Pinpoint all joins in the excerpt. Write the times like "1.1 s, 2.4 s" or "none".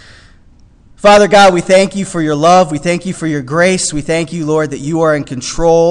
none